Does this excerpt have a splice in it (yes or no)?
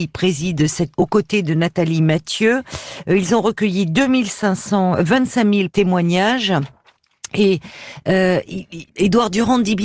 yes